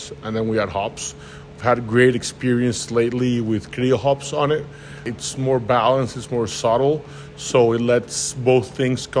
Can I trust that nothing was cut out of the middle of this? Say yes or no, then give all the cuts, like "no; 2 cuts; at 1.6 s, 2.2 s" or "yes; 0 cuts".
yes; 0 cuts